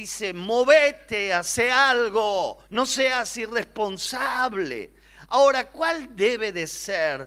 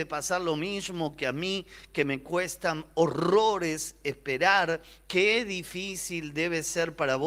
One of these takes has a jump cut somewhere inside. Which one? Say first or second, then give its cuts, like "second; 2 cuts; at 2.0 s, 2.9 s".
first; 1 cut; at 2.7 s